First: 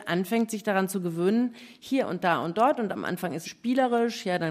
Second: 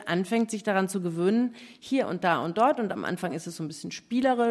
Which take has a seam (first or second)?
first